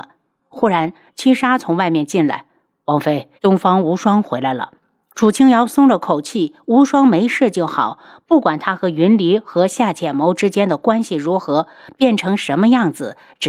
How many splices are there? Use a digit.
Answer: 2